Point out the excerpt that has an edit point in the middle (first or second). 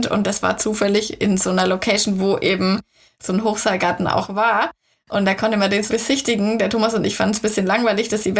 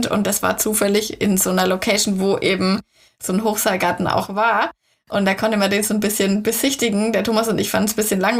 first